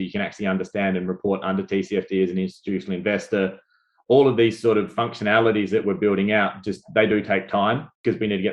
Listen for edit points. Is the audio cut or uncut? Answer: uncut